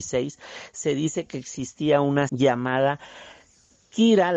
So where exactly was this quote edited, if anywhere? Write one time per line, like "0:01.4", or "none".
0:02.3